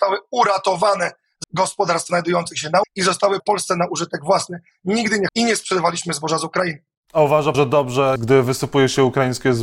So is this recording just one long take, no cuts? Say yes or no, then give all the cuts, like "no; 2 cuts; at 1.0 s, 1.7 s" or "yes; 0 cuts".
no; 7 cuts; at 1.4 s, 2.1 s, 2.8 s, 3.4 s, 5.3 s, 7.5 s, 8.2 s